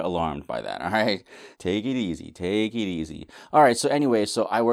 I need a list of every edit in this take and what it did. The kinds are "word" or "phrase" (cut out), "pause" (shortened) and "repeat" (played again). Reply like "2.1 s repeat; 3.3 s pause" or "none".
1.5 s pause